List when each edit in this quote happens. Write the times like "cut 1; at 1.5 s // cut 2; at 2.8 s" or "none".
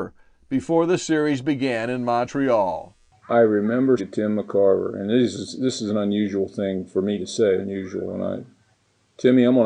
cut 1; at 4.0 s // cut 2; at 7.6 s